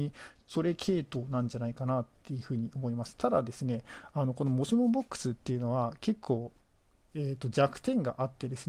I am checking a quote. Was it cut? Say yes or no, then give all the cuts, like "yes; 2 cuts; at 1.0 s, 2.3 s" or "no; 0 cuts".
no; 0 cuts